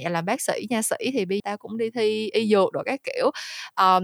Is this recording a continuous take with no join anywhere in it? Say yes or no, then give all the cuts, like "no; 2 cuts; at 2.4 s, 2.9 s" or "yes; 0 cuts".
no; 1 cut; at 1.4 s